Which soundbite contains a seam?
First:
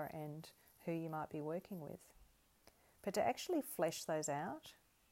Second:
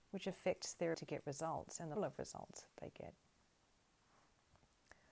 second; 2 cuts; at 0.9 s, 2.0 s

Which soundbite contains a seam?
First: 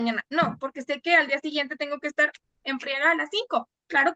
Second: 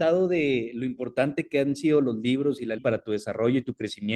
second; 1 cut; at 2.8 s

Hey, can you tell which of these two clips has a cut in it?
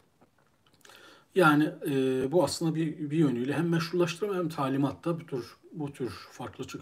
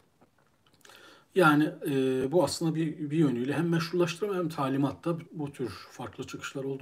second; 1 cut; at 5.3 s

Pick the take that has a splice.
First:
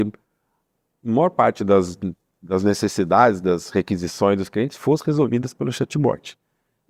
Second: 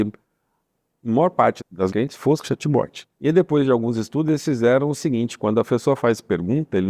second; 4 cuts; at 1.6 s, 1.9 s, 2.4 s, 3.1 s

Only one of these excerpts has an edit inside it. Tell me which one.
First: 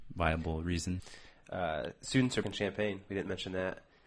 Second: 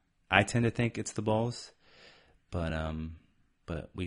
first; 1 cut; at 2.4 s

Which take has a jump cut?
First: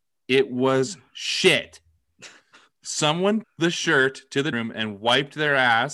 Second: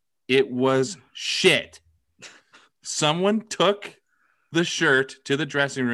first; 2 cuts; at 3.4 s, 4.5 s

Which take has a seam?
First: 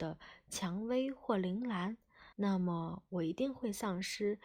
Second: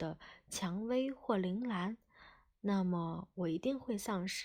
first; 1 cut; at 2.3 s

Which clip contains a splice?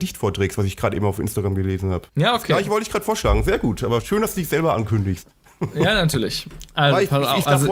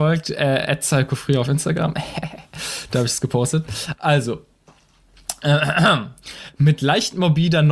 first; 1 cut; at 2.1 s

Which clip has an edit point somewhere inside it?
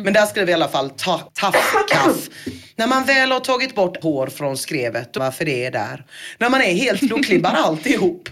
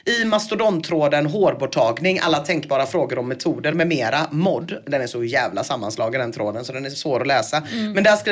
first; 4 cuts; at 1.3 s, 4.0 s, 5.2 s, 7.0 s

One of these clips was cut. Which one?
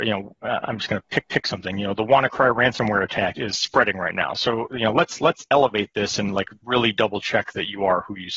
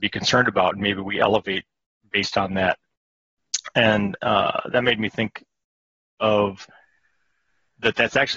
first; 2 cuts; at 1.2 s, 3.4 s

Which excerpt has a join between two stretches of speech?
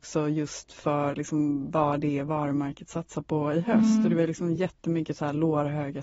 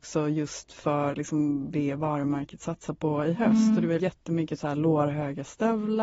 second; 2 cuts; at 1.7 s, 4.0 s

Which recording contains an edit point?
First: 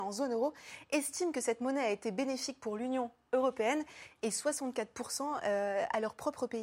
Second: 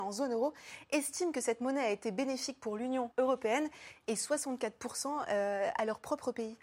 second; 1 cut; at 3.1 s

